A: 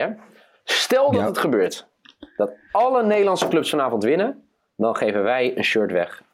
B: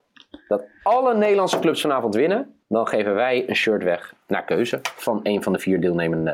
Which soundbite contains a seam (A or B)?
B